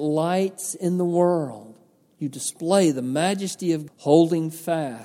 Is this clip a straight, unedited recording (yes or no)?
no